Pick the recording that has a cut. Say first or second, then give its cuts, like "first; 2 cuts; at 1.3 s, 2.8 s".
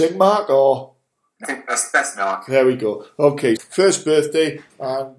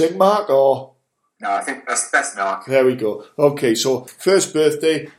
first; 2 cuts; at 1.4 s, 3.6 s